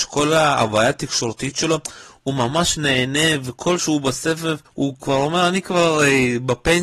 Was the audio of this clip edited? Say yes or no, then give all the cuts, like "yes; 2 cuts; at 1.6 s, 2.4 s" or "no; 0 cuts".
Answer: yes; 2 cuts; at 3.8 s, 5.0 s